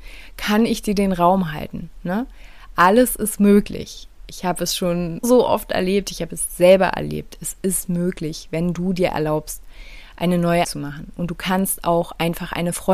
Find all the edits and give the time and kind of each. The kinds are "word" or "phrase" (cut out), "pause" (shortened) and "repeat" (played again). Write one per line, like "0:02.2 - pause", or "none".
0:05.2 - word
0:10.6 - word